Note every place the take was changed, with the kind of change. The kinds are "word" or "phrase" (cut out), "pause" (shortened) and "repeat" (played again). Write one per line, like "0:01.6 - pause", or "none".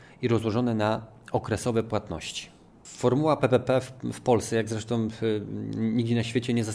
none